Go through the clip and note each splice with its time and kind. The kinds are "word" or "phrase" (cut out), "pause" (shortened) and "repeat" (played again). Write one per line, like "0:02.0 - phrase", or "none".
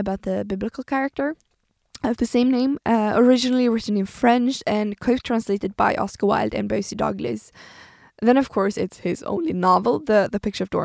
none